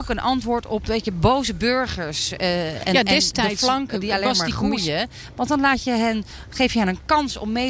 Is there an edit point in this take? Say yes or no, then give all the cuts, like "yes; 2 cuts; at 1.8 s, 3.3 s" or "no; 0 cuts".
no; 0 cuts